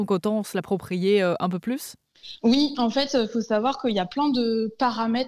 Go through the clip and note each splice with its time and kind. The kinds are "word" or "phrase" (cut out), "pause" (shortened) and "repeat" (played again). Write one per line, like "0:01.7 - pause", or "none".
none